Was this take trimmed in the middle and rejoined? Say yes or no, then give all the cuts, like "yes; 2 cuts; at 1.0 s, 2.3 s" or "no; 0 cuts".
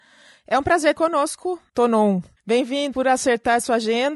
yes; 2 cuts; at 0.9 s, 2.9 s